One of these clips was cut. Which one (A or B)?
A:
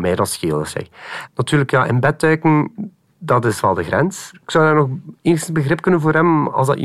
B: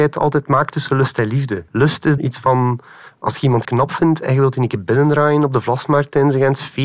B